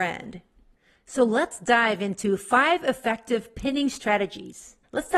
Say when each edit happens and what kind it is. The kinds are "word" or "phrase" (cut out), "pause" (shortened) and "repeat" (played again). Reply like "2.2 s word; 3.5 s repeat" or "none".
none